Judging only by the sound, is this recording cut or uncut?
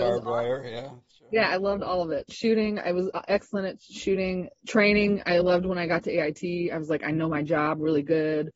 uncut